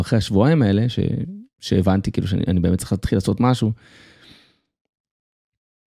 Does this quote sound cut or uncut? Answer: uncut